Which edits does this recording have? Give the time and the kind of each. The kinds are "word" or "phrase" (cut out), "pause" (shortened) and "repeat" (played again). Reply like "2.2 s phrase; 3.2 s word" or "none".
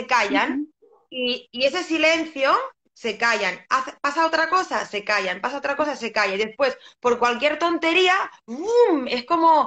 none